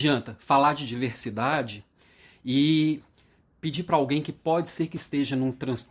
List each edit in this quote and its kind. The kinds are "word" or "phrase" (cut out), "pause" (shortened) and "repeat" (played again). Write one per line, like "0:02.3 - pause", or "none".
none